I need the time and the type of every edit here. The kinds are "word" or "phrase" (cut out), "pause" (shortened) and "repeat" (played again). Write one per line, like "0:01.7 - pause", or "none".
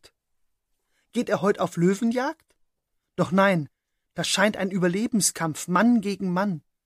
none